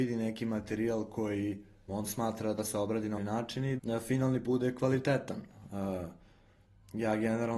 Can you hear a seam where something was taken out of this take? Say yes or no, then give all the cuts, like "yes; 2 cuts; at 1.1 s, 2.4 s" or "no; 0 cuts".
yes; 5 cuts; at 1.9 s, 2.6 s, 3.2 s, 3.8 s, 4.4 s